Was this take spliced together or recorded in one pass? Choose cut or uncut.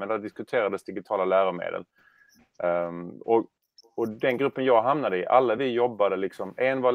uncut